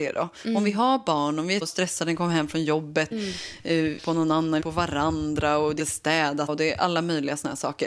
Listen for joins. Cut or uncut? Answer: cut